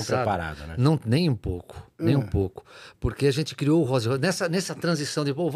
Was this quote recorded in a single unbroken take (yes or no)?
yes